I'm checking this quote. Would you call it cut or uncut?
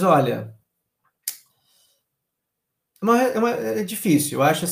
uncut